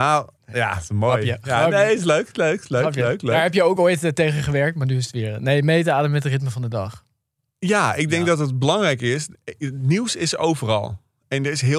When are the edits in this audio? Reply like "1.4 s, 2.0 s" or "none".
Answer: none